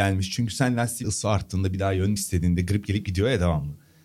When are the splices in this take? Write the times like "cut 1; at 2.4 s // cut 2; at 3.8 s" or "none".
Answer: cut 1; at 1.0 s // cut 2; at 2.2 s